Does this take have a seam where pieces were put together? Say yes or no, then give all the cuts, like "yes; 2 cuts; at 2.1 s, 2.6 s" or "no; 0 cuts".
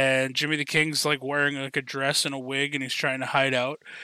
no; 0 cuts